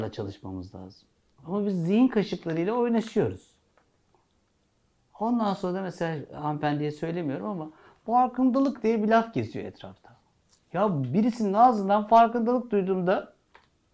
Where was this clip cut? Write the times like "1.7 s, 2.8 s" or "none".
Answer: none